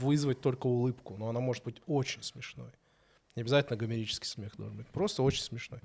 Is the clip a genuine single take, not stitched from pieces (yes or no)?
yes